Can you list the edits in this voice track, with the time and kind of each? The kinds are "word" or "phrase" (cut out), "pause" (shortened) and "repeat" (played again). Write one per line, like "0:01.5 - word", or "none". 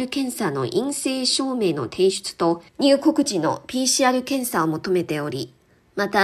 0:02.7 - pause